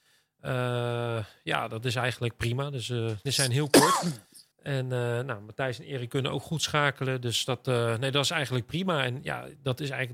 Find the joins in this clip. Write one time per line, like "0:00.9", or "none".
0:03.3
0:04.5